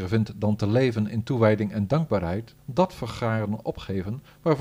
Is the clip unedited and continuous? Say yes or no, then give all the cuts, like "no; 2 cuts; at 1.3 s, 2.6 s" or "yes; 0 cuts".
no; 1 cut; at 2.6 s